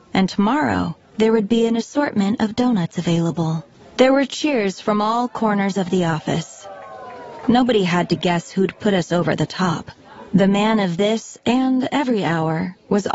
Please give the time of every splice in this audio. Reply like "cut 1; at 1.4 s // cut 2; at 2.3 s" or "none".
cut 1; at 3.7 s